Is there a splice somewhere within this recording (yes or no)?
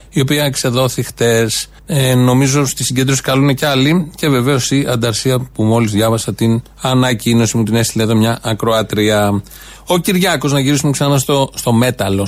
yes